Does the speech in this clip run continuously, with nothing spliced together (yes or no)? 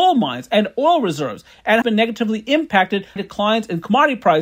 no